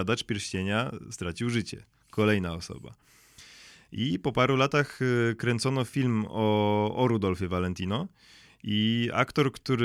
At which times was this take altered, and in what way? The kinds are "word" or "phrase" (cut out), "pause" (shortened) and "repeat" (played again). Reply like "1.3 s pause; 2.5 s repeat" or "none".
none